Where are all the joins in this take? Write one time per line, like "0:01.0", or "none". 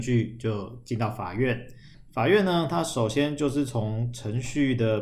0:01.9